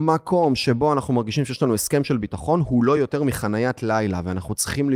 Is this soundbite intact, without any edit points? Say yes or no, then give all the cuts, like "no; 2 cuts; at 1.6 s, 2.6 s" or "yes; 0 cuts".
yes; 0 cuts